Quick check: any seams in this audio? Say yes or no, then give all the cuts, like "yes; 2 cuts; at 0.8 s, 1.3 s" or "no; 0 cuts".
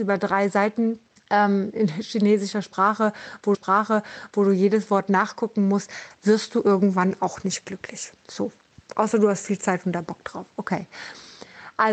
yes; 2 cuts; at 1.2 s, 3.5 s